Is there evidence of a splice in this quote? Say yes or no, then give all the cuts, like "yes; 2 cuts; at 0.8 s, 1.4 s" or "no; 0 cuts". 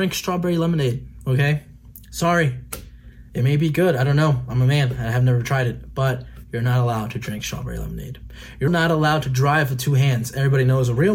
yes; 1 cut; at 8.7 s